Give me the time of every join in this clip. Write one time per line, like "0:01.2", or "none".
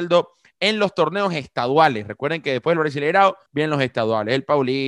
0:03.5